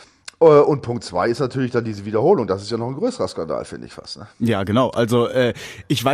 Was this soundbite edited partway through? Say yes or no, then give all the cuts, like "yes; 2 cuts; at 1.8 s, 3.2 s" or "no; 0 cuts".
no; 0 cuts